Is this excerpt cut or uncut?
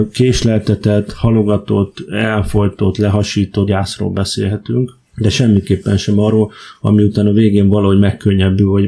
cut